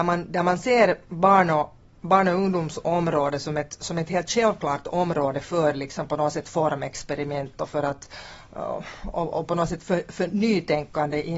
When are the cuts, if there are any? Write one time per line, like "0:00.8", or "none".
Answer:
none